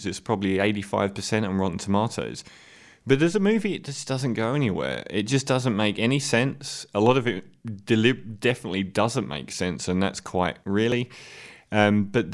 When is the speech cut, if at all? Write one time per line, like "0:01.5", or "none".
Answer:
0:10.6